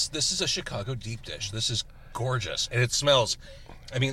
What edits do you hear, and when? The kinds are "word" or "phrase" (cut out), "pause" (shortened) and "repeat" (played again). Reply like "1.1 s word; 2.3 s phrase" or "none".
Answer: none